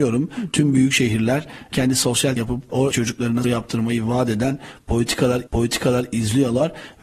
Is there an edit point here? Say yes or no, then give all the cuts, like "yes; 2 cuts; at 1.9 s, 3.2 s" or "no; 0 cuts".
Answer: yes; 4 cuts; at 2.4 s, 2.9 s, 3.4 s, 5.5 s